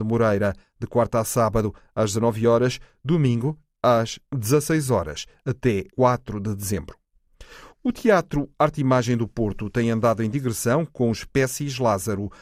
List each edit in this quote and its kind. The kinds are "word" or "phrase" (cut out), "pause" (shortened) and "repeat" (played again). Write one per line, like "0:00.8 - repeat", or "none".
0:05.9 - pause

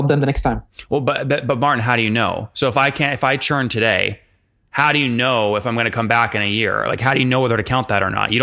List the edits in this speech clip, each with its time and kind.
none

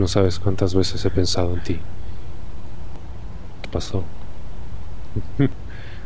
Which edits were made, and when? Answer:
0:03.6 - word

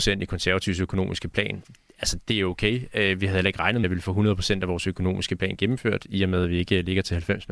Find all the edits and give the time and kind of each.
0:03.8 - word

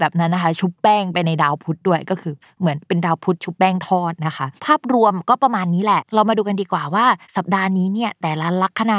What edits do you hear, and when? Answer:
0:04.6 - pause
0:07.2 - pause

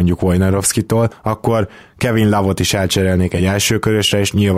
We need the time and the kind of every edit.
none

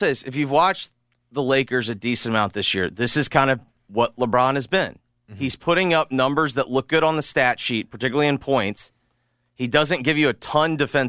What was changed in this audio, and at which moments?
none

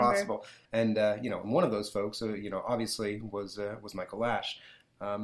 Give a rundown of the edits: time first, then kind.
none

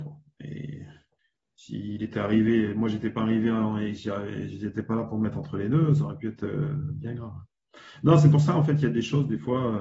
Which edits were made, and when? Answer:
0:01.2 - pause

